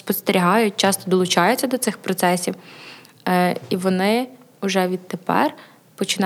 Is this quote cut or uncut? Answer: uncut